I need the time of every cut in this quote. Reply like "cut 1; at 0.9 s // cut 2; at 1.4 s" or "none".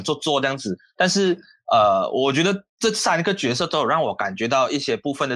none